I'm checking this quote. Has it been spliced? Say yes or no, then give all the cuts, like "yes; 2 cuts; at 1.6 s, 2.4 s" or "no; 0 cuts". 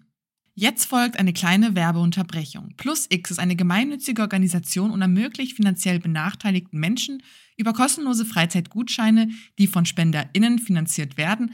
no; 0 cuts